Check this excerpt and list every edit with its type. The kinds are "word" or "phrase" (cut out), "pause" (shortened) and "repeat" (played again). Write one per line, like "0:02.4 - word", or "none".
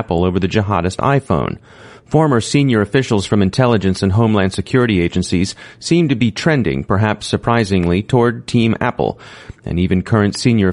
none

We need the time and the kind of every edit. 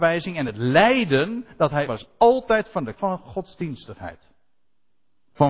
0:01.9 - word
0:03.0 - word

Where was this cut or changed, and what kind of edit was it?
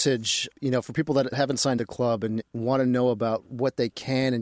0:01.8 - phrase

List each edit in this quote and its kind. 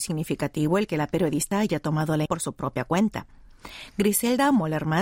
0:01.5 - word
0:02.3 - word

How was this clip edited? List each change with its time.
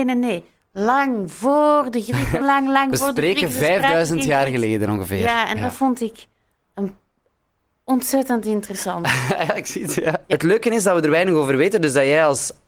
0:02.4 - word

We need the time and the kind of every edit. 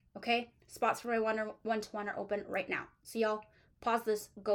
none

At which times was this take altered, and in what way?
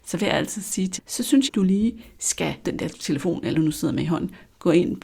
0:01.0 - word
0:01.5 - word
0:02.6 - word
0:03.5 - word

